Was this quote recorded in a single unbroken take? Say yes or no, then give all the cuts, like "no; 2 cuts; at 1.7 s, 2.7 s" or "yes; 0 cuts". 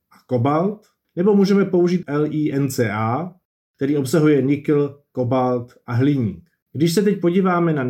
no; 1 cut; at 2.0 s